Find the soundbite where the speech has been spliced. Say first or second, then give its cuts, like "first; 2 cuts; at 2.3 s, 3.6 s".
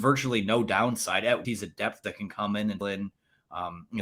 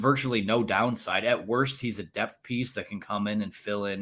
first; 3 cuts; at 1.4 s, 2.0 s, 2.8 s